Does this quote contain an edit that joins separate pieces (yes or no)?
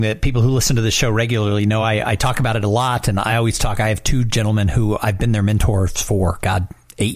no